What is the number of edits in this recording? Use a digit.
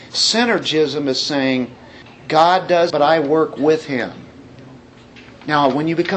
2